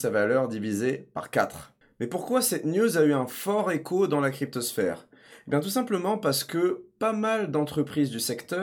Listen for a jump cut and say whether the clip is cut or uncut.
uncut